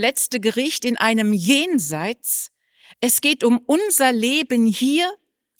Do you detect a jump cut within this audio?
no; 0 cuts

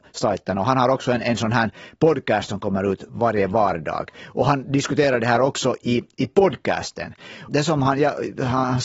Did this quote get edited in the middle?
no; 0 cuts

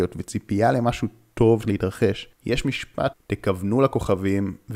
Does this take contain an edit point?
yes; 2 cuts; at 1.6 s, 3.1 s

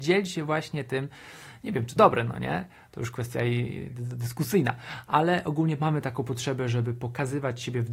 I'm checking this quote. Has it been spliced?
yes; 1 cut; at 2.0 s

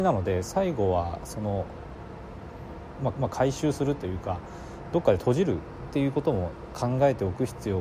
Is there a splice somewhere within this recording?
yes; 1 cut; at 3.1 s

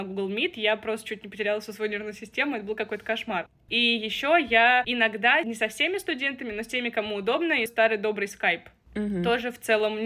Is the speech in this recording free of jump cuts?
no; 1 cut; at 7.7 s

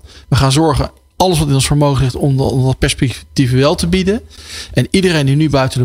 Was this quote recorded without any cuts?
yes; 0 cuts

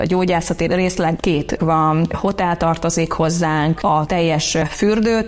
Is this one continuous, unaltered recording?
no; 2 cuts; at 1.6 s, 3.8 s

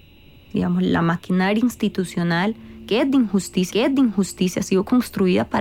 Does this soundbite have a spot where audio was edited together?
yes; 1 cut; at 3.7 s

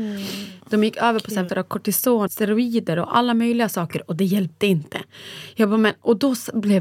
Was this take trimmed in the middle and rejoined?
yes; 2 cuts; at 1.5 s, 2.3 s

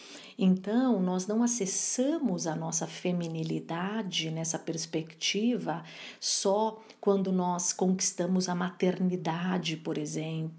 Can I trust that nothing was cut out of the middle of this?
yes; 0 cuts

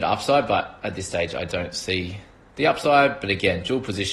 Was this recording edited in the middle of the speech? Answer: no; 0 cuts

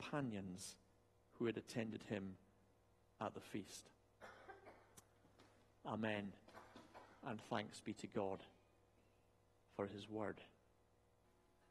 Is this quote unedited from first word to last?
yes; 0 cuts

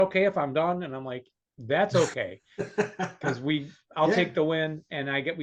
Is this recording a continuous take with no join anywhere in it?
yes; 0 cuts

